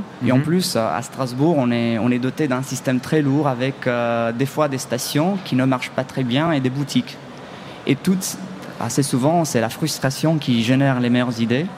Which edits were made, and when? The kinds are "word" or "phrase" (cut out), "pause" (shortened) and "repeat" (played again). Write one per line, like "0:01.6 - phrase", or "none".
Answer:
none